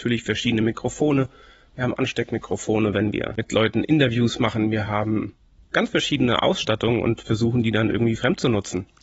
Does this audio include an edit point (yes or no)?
no